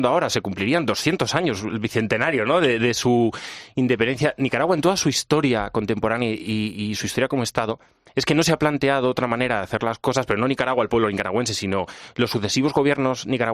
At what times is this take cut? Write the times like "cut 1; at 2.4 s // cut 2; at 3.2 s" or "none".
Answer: none